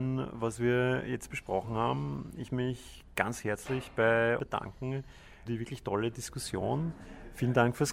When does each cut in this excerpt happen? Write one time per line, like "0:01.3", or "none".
0:02.5
0:04.4
0:05.5